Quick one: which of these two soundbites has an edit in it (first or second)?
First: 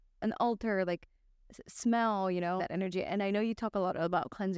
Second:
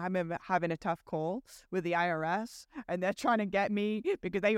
first